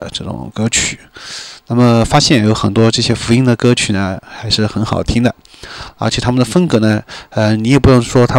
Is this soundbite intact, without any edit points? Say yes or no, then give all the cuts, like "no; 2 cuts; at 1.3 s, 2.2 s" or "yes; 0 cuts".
yes; 0 cuts